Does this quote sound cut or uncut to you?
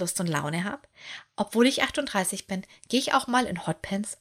uncut